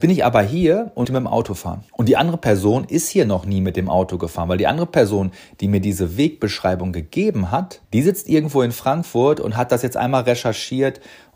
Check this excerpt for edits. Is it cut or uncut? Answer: cut